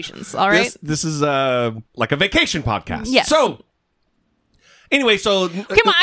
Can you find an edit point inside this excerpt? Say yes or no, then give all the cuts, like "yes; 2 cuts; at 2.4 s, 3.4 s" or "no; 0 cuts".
yes; 1 cut; at 1.9 s